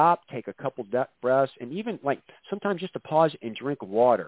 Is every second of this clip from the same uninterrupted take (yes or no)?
yes